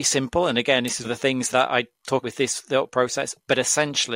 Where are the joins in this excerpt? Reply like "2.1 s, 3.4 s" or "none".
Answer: 1.0 s, 1.5 s, 2.2 s